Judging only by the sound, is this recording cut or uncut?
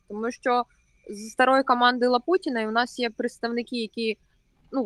uncut